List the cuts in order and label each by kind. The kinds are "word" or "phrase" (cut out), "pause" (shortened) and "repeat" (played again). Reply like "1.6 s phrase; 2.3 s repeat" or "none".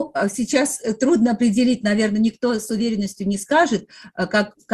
none